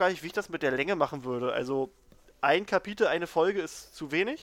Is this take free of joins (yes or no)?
yes